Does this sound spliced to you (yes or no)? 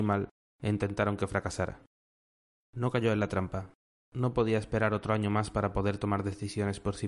no